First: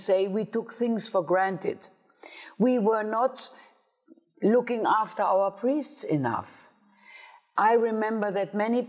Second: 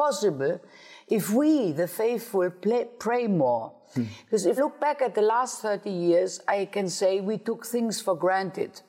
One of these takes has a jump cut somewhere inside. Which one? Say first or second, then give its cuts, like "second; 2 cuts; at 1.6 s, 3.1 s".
second; 1 cut; at 4.6 s